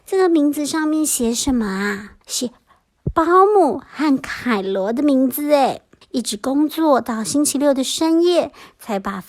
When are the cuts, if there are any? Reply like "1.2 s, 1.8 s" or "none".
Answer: 2.2 s, 6.0 s